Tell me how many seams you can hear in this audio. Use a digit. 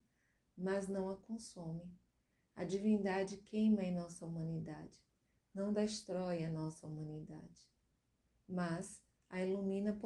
0